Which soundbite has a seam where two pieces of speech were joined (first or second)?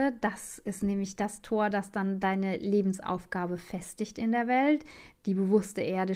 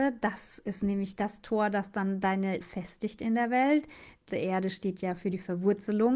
second